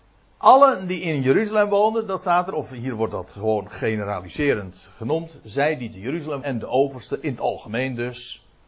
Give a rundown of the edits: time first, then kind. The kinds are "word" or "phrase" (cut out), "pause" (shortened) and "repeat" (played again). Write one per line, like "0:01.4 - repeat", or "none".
0:06.4 - word